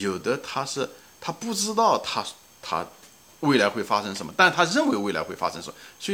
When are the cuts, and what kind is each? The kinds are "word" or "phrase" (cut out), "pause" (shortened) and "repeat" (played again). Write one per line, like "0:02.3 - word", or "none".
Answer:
none

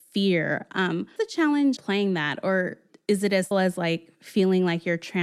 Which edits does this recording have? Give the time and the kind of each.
0:01.2 - word
0:01.8 - word
0:03.5 - word

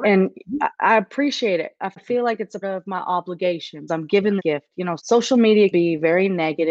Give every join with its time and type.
0:01.9 - word
0:02.6 - word
0:03.9 - word
0:04.4 - word
0:05.0 - word
0:05.7 - word

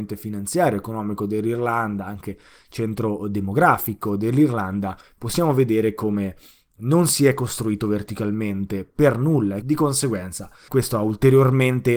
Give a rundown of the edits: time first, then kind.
0:09.6 - word
0:10.7 - word

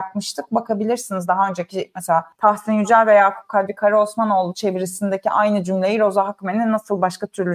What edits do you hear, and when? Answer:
0:02.3 - pause

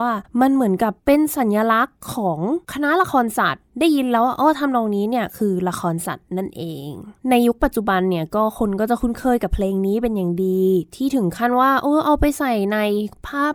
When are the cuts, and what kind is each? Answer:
0:01.0 - pause
0:02.6 - pause
0:03.7 - pause
0:07.2 - pause

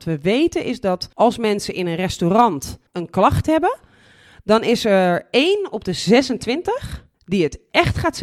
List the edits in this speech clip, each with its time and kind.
0:01.1 - pause
0:02.9 - pause
0:07.1 - pause

